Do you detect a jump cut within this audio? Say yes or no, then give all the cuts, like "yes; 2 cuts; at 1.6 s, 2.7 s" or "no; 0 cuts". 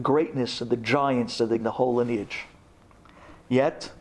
yes; 1 cut; at 1.6 s